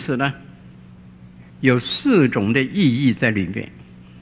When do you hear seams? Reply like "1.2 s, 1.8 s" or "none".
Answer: 1.5 s